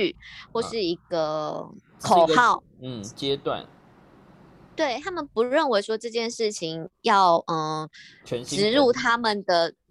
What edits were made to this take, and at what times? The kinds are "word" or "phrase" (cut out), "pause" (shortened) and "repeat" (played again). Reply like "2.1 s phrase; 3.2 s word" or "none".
none